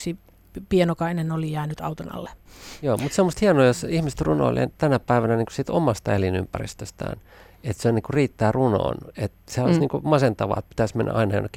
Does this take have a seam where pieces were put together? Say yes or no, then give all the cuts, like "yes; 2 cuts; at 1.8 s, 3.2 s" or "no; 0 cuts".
no; 0 cuts